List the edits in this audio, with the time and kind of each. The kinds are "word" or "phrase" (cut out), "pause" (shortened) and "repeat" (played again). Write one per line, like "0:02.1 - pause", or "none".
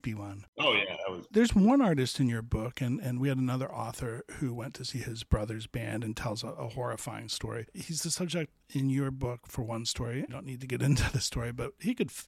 0:10.3 - phrase